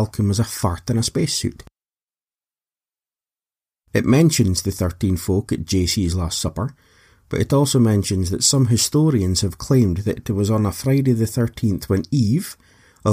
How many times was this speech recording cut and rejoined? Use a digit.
0